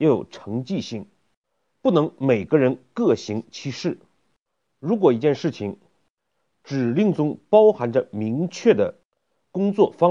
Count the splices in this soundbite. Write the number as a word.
zero